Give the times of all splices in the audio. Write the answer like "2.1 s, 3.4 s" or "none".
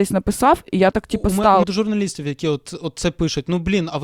0.9 s, 1.6 s

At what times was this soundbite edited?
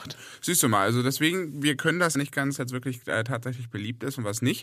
2.1 s, 2.6 s

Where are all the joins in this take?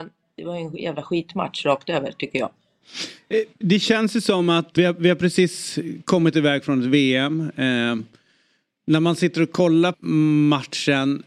4.8 s, 9.9 s

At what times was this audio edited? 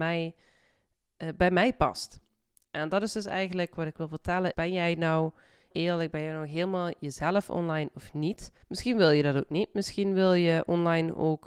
4.5 s, 5.7 s, 8.6 s

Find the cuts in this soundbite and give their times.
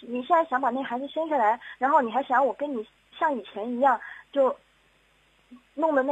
3.0 s

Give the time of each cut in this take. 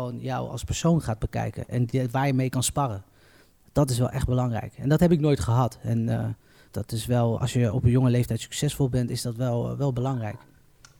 6.7 s, 7.4 s

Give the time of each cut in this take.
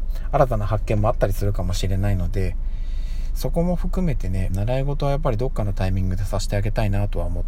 4.5 s

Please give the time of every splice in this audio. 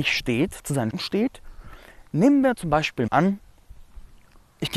0.9 s, 3.1 s

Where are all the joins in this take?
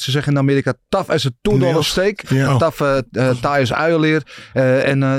1.4 s, 2.5 s

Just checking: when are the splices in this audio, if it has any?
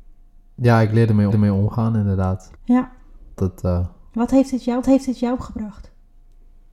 1.3 s, 2.6 s, 3.4 s, 4.8 s

